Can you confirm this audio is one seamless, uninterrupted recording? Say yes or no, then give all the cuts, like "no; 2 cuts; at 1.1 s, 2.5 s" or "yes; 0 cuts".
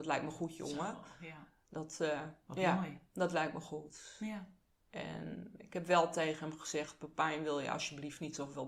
yes; 0 cuts